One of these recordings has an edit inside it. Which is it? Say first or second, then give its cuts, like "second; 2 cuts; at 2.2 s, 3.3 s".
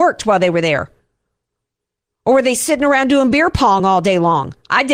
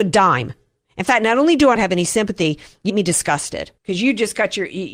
second; 3 cuts; at 1.8 s, 2.9 s, 3.8 s